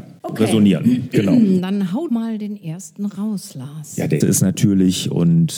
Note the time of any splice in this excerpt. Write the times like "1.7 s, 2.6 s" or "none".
2.1 s, 4.2 s

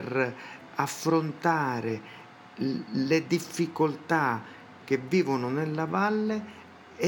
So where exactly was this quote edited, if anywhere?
4.8 s

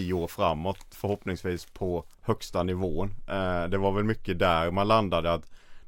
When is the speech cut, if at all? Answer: 2.1 s

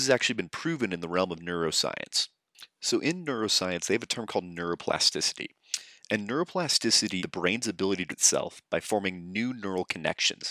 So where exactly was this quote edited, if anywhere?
7.2 s, 8.1 s

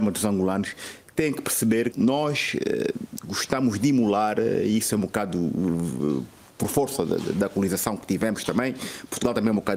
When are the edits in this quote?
1.9 s

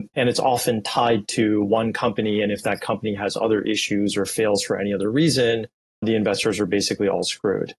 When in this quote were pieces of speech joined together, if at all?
6.0 s

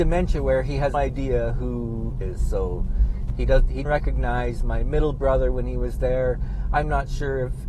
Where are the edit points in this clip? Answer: 0.9 s, 2.2 s, 3.8 s

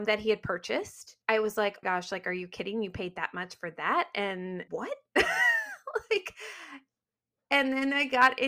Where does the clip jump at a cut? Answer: 1.2 s, 1.8 s, 4.7 s

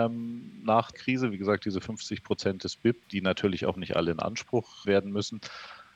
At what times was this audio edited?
0.9 s, 3.0 s, 4.8 s

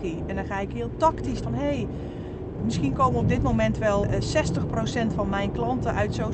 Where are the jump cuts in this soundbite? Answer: 1.4 s, 2.6 s, 4.0 s

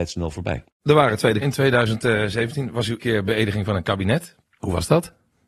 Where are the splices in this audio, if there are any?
1.4 s, 3.0 s, 4.5 s

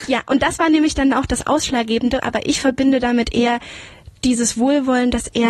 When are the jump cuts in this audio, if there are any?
none

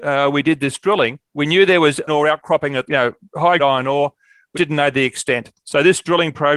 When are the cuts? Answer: 1.3 s, 2.1 s, 2.9 s, 3.6 s, 4.5 s, 5.6 s

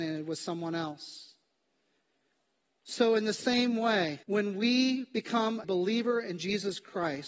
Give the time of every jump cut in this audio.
4.2 s, 5.6 s

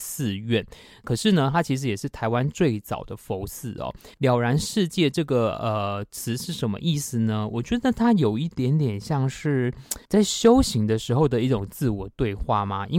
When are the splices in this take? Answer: 4.1 s, 10.0 s

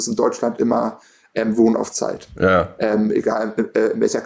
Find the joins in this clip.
none

